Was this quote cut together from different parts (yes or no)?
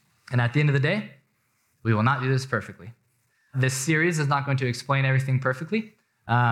no